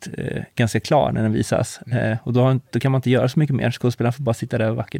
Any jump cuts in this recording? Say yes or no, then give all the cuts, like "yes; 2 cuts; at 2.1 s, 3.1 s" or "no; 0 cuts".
no; 0 cuts